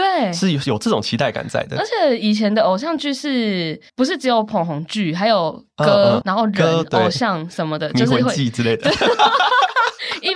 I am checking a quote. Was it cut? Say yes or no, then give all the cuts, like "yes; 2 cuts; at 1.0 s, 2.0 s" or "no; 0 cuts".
yes; 2 cuts; at 3.9 s, 6.2 s